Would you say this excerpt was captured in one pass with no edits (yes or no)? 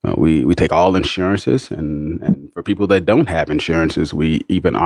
yes